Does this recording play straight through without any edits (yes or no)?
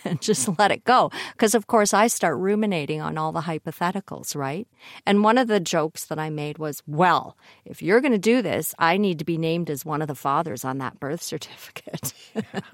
yes